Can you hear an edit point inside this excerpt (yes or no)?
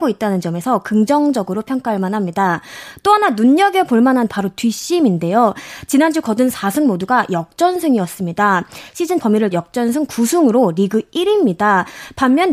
yes